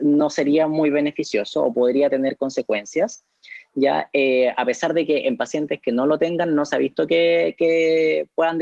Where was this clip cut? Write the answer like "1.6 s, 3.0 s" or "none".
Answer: none